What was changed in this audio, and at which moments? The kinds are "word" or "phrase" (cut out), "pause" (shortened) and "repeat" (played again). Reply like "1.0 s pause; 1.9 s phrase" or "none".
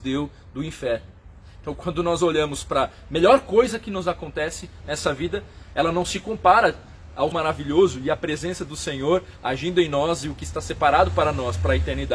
7.3 s word